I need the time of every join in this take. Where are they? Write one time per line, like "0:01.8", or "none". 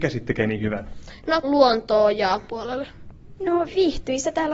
0:01.4
0:02.5

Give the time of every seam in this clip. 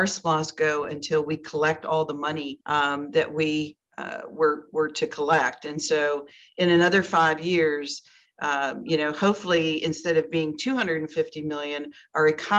0:02.6

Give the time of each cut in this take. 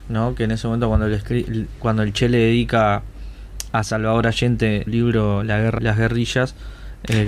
0:04.9
0:05.8

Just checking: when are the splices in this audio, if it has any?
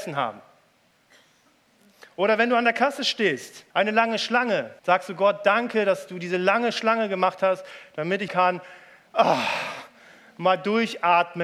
0:03.7
0:04.8
0:08.3

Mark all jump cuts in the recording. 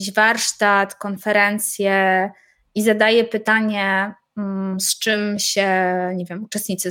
none

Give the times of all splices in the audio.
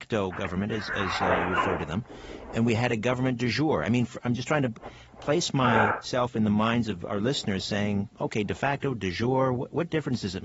none

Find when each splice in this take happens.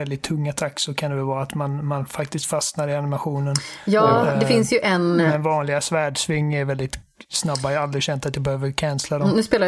none

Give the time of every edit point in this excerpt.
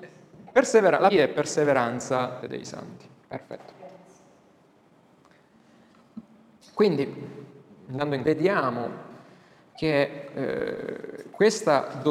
0:01.1
0:02.4
0:03.2
0:07.7
0:08.2

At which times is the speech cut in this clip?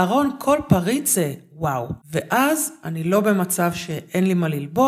0:02.0

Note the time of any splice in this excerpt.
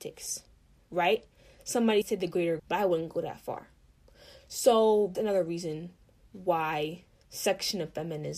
0:02.0
0:02.6
0:05.1
0:07.2

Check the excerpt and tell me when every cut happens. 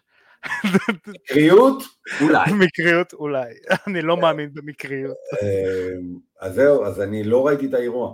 none

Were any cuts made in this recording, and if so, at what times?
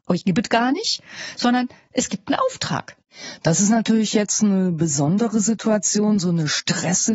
none

